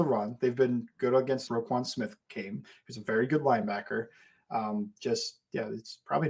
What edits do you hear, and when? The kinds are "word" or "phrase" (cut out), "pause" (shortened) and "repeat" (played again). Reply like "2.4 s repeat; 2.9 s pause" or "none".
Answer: 1.5 s phrase